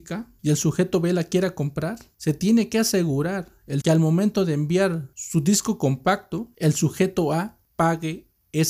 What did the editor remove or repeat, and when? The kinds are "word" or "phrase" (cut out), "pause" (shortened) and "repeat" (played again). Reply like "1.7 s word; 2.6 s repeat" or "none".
3.8 s phrase